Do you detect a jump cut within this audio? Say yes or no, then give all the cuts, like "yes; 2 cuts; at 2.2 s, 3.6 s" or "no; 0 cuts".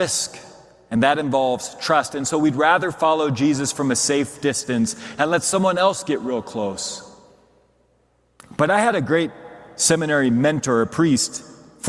no; 0 cuts